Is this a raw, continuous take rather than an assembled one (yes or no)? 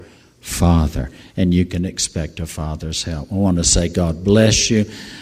yes